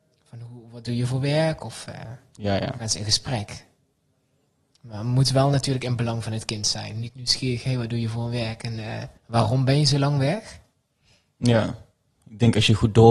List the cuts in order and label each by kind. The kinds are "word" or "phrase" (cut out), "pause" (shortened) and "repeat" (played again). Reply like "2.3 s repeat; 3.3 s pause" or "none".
9.2 s pause